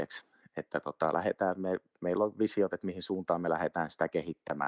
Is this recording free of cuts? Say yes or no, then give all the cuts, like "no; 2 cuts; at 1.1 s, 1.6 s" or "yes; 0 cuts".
yes; 0 cuts